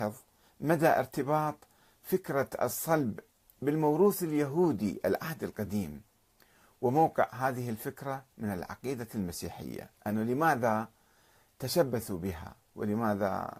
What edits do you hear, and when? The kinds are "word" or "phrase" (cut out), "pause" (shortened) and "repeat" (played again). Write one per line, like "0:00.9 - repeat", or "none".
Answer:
0:10.0 - pause